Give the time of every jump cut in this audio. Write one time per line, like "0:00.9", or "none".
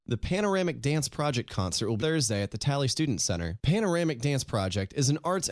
0:02.0